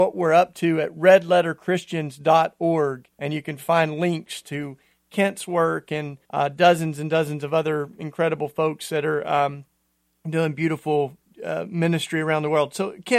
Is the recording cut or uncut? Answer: cut